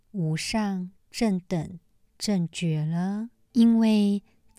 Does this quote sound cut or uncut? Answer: uncut